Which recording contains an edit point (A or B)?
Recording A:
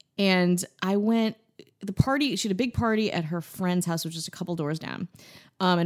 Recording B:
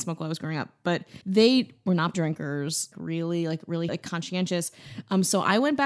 B